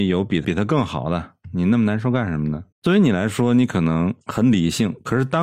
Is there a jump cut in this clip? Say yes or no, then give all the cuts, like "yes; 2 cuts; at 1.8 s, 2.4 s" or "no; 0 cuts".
yes; 1 cut; at 2.7 s